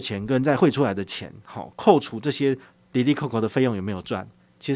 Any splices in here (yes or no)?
no